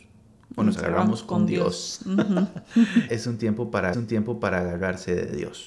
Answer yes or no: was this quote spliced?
yes